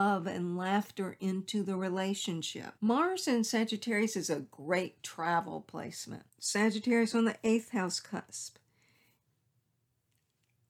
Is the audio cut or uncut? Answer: cut